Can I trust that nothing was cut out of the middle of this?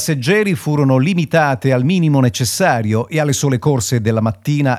yes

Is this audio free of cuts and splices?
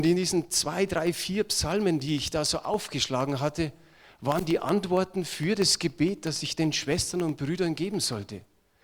yes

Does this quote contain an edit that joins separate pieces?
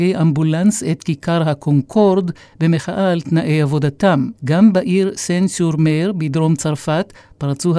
yes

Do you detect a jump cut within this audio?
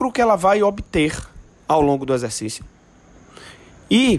no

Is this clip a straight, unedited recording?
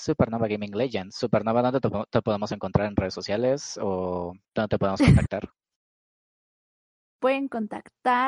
no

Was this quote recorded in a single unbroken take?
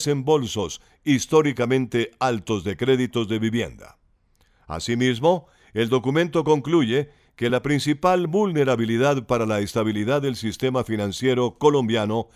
yes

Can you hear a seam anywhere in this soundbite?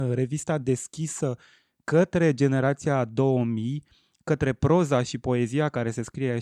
no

